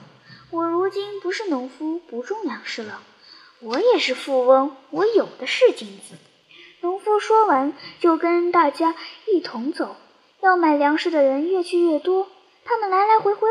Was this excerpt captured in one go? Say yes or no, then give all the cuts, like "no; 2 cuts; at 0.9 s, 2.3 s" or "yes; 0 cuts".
yes; 0 cuts